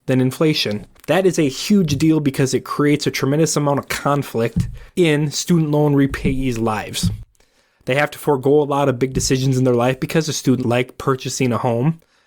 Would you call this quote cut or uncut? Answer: cut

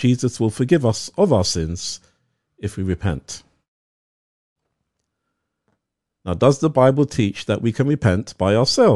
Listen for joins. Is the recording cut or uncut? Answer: uncut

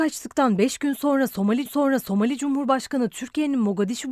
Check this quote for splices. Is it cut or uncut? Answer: cut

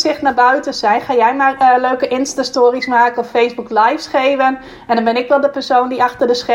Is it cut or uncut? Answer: uncut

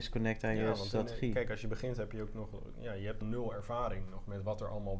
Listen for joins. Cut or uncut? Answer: cut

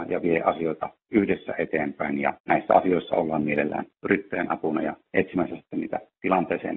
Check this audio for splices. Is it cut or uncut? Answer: cut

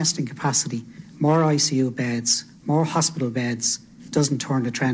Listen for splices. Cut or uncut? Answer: uncut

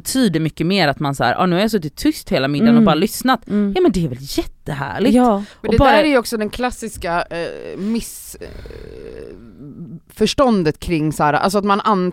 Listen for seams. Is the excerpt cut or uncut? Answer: uncut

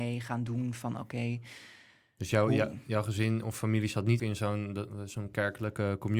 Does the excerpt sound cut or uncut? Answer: cut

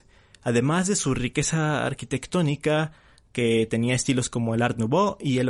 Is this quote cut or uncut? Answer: uncut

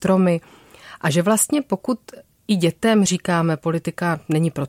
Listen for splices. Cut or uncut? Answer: uncut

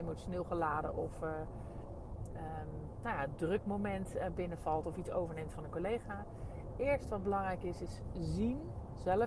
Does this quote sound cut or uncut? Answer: uncut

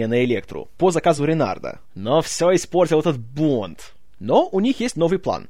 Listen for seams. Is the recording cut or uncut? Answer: uncut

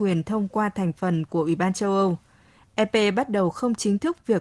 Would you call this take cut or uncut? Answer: uncut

